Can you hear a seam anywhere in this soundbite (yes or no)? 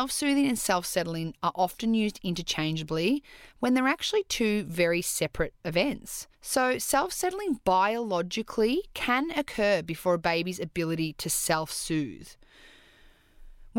yes